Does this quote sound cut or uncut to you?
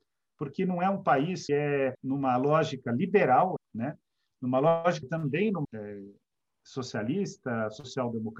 cut